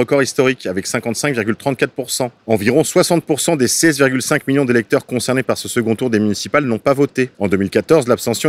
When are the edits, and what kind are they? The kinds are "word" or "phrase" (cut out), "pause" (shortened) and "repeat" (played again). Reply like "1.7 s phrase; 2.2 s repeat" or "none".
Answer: 2.4 s pause; 7.3 s pause